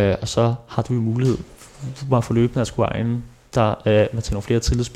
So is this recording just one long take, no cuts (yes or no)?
yes